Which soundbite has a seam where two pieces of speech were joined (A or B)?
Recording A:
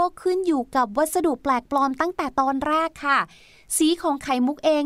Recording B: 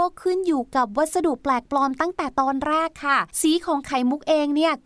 B